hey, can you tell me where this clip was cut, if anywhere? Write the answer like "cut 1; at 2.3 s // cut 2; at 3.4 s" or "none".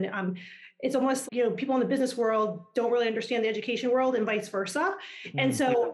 cut 1; at 1.3 s